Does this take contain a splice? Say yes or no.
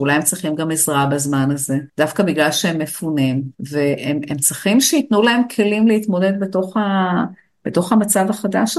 yes